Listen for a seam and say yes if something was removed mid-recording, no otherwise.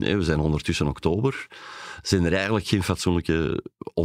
no